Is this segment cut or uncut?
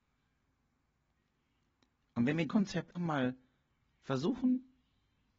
cut